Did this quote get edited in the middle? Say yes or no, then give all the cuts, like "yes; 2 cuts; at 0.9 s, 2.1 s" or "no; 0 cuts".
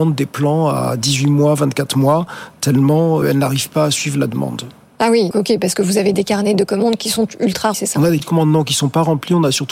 yes; 5 cuts; at 3.2 s, 5.3 s, 6.1 s, 7.7 s, 8.2 s